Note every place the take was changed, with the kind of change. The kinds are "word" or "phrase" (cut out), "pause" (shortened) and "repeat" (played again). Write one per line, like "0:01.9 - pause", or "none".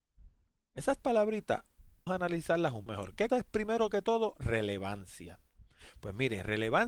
0:01.0 - word
0:02.1 - word
0:02.9 - word
0:03.3 - word